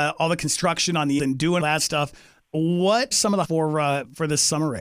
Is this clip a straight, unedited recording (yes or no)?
no